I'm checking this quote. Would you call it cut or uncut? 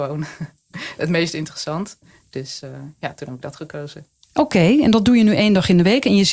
uncut